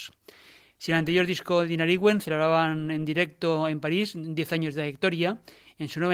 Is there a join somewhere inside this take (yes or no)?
no